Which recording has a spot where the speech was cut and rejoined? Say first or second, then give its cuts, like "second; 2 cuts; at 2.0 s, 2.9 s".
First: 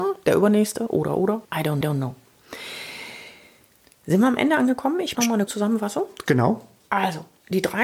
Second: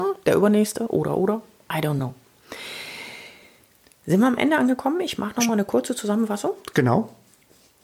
first; 5 cuts; at 1.4 s, 1.8 s, 5.1 s, 5.5 s, 6.8 s